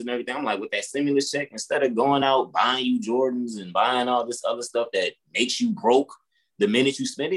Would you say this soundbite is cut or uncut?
uncut